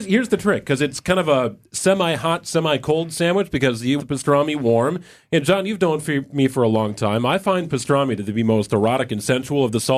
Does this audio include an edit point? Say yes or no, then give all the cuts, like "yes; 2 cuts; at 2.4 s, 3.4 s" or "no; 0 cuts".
yes; 1 cut; at 4.0 s